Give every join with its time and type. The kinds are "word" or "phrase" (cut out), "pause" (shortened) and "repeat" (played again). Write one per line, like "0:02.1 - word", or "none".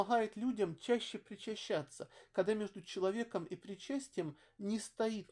none